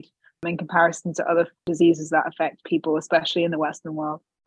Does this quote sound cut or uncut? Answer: uncut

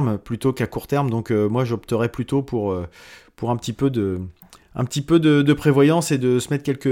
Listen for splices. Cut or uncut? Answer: uncut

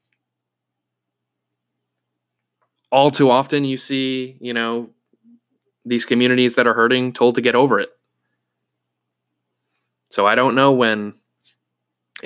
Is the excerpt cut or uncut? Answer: uncut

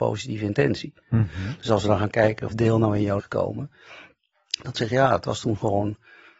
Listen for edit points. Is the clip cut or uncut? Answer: cut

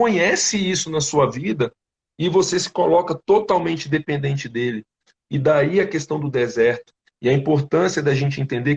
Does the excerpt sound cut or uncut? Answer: uncut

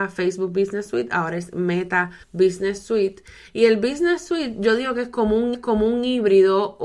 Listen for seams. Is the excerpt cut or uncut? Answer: cut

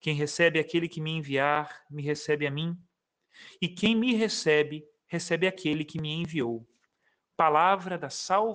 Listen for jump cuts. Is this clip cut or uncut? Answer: uncut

